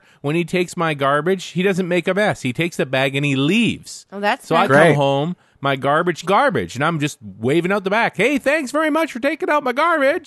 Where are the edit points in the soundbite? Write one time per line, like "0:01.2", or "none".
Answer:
0:06.2